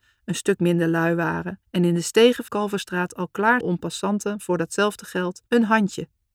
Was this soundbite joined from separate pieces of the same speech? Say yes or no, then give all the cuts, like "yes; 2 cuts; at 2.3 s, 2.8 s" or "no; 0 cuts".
yes; 4 cuts; at 1.6 s, 2.5 s, 3.6 s, 5.5 s